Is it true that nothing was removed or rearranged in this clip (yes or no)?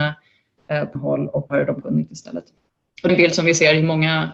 no